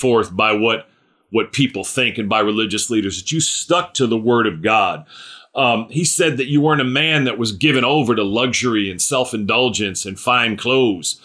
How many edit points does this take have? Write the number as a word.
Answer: zero